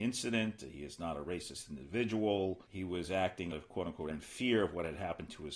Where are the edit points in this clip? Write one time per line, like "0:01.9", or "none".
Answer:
0:02.7
0:03.5
0:04.1